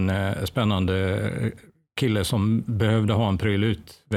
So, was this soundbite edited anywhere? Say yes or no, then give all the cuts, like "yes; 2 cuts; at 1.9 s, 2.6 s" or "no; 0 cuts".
no; 0 cuts